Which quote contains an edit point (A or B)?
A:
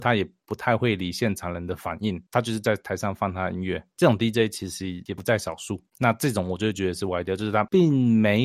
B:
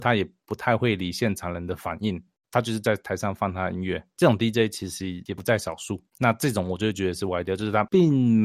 A